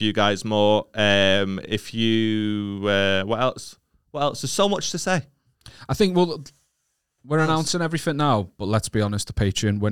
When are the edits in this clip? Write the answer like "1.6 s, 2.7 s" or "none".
none

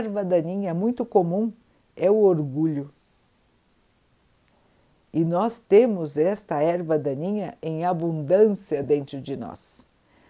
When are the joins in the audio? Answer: none

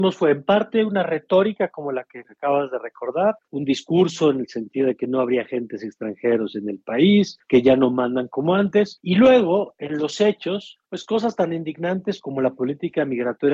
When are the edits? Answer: none

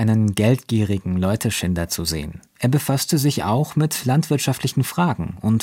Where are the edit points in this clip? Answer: 2.5 s

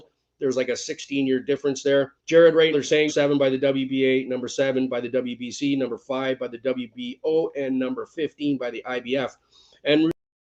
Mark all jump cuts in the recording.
2.2 s, 2.7 s, 3.1 s

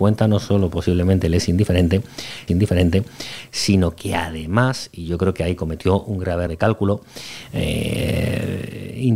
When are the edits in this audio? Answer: 2.5 s, 6.5 s

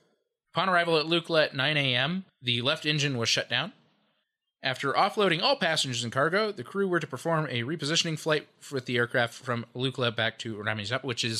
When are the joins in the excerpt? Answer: none

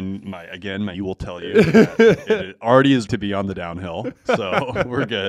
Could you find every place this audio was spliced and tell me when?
0.9 s, 3.1 s

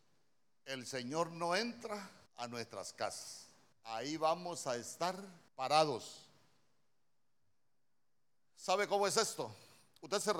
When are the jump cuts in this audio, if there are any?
2.3 s, 3.7 s, 5.5 s

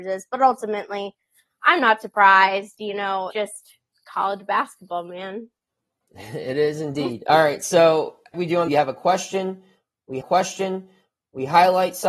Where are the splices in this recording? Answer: 3.3 s, 8.3 s, 8.7 s, 10.2 s

